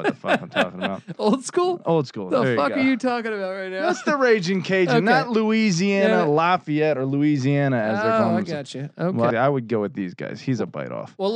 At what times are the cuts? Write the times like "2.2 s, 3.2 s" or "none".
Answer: 9.3 s

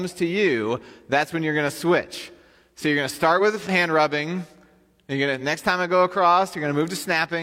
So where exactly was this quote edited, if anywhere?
none

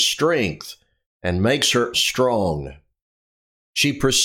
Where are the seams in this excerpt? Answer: 1.9 s

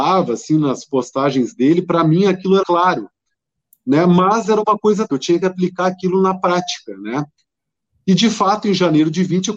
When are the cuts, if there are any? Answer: 2.6 s, 5.1 s

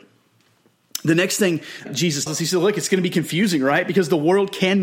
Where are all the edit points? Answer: 1.9 s, 2.3 s

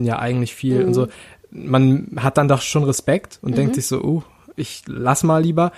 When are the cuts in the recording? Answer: none

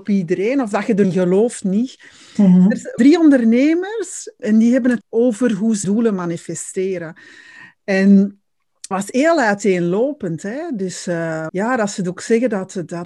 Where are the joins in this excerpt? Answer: 1.0 s, 1.6 s, 3.0 s, 4.4 s, 5.0 s, 5.8 s, 8.9 s, 11.5 s

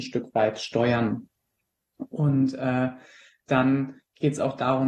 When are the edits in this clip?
none

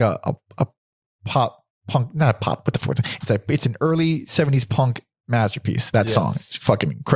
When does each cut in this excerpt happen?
none

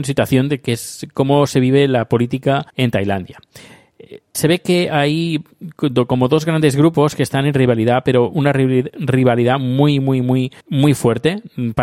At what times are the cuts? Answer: 2.7 s, 4.3 s, 10.6 s

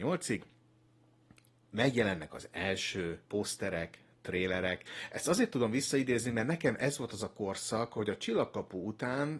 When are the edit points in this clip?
3.3 s

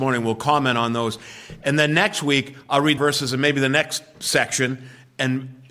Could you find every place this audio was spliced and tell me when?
3.0 s

